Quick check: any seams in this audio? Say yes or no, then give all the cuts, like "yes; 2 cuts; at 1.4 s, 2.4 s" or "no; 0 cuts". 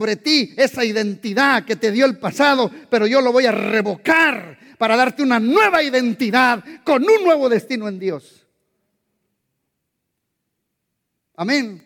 no; 0 cuts